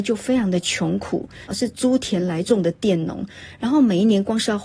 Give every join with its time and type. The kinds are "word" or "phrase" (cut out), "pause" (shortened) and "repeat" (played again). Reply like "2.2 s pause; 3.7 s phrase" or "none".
1.5 s phrase